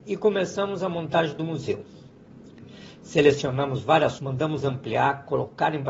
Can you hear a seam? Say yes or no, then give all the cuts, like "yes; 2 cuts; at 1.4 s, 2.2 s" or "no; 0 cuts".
yes; 1 cut; at 4.2 s